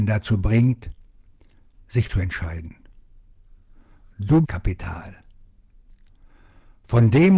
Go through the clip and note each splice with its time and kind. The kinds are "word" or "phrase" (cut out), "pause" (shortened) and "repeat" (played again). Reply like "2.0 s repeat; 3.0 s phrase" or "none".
2.1 s phrase; 4.4 s phrase